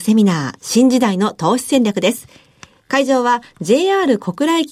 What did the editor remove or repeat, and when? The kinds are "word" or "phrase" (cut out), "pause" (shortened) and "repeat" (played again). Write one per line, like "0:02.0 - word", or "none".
none

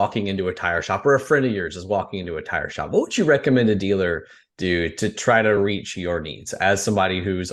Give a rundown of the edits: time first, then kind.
none

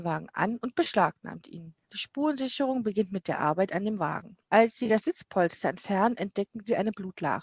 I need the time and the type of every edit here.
0:01.8 - pause
0:04.4 - pause

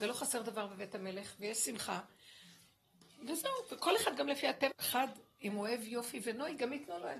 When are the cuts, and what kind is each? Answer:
0:04.7 - word

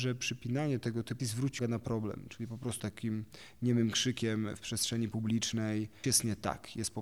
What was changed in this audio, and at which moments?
0:01.2 - word
0:01.6 - word
0:02.8 - word
0:06.0 - word

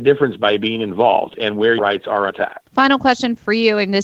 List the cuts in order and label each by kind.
0:01.8 - word
0:02.3 - word
0:02.7 - pause

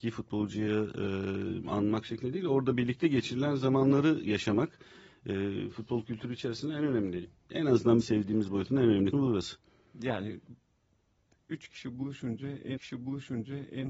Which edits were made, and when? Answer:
0:08.0 - word
0:09.1 - word
0:12.8 - repeat

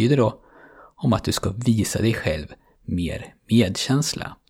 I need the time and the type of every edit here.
none

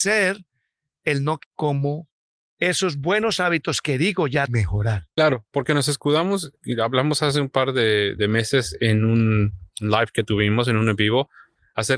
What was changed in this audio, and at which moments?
0:01.4 - phrase
0:04.5 - phrase
0:06.5 - word

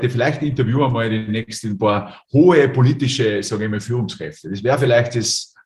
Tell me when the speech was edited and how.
none

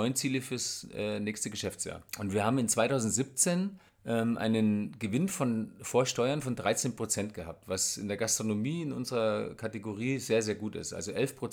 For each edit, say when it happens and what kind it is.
0:02.1 - pause
0:03.9 - pause

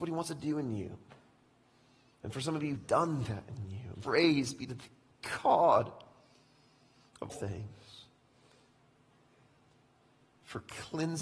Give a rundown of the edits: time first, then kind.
0:02.8 - word
0:04.0 - word
0:07.3 - word

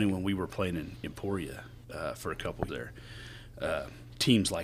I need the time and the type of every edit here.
0:01.8 - pause
0:02.7 - word

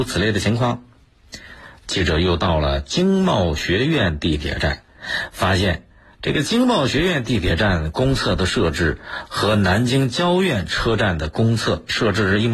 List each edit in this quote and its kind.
none

